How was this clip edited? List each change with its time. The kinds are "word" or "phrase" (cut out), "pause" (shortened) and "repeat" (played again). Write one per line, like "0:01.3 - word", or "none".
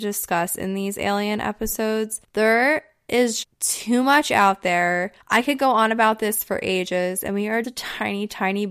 0:03.4 - word
0:05.2 - pause
0:07.6 - word